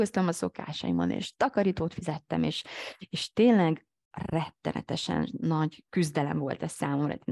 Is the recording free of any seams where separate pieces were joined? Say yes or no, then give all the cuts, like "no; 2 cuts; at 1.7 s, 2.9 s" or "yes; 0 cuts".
no; 1 cut; at 5.9 s